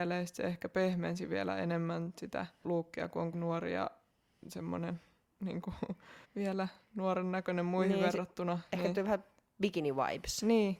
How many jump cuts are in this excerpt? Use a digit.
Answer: 3